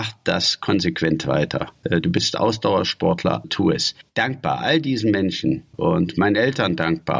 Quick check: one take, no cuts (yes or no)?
no